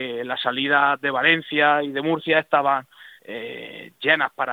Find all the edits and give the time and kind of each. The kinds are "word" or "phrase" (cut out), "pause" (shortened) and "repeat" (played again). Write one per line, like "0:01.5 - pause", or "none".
0:03.2 - pause